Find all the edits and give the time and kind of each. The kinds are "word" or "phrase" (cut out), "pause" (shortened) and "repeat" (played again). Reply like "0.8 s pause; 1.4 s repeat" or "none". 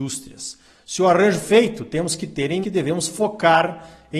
1.4 s word; 2.6 s word